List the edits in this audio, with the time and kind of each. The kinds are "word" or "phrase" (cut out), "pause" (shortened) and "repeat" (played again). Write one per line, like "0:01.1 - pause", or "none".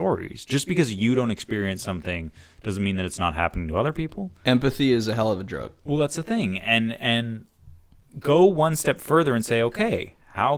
none